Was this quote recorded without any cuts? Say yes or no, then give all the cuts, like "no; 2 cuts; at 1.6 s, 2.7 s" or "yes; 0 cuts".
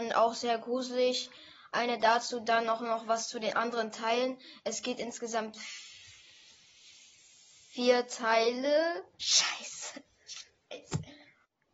no; 1 cut; at 9.1 s